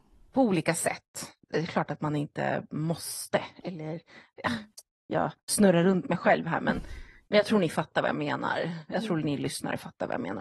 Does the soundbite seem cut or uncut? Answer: uncut